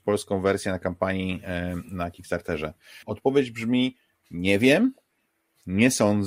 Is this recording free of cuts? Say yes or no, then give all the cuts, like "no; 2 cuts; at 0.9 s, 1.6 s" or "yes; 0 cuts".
no; 1 cut; at 3.0 s